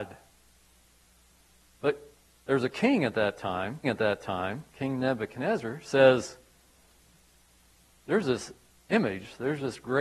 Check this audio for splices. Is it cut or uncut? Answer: cut